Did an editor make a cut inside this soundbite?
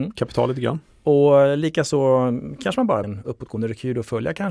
yes; 1 cut; at 3.0 s

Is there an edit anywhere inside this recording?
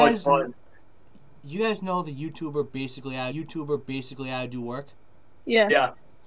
yes; 1 cut; at 3.3 s

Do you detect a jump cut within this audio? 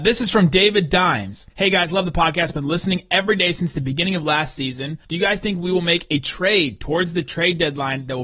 yes; 2 cuts; at 1.5 s, 5.0 s

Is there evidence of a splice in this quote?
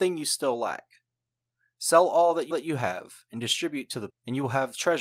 yes; 2 cuts; at 2.5 s, 4.1 s

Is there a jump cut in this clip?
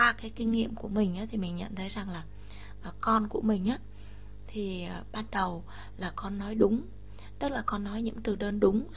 no; 0 cuts

